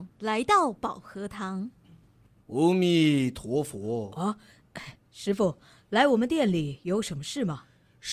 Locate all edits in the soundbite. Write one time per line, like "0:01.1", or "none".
none